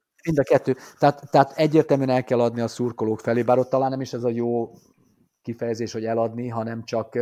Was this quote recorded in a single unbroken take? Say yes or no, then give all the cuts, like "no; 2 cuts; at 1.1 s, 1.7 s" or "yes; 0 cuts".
yes; 0 cuts